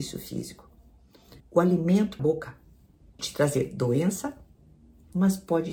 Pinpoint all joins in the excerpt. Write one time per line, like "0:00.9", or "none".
0:01.4
0:02.2
0:03.2

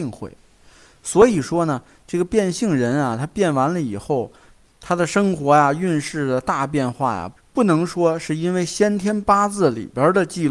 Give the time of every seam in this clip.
none

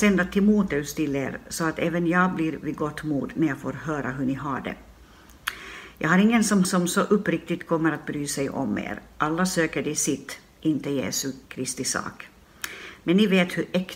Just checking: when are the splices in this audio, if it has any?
0:06.6
0:11.4

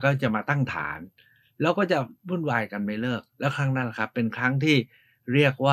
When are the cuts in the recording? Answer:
0:02.2

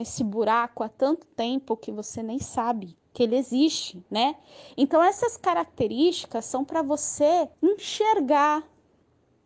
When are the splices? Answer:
0:03.1
0:04.1
0:07.5

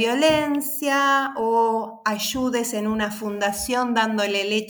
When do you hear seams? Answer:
none

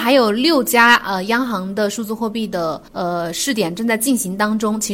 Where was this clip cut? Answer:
0:02.9

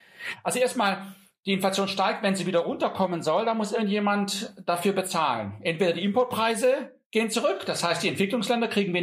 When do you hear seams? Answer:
none

